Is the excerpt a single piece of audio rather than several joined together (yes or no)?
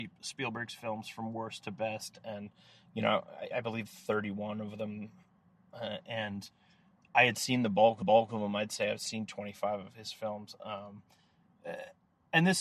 no